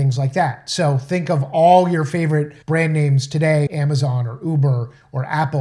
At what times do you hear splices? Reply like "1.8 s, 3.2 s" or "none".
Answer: 2.6 s, 3.7 s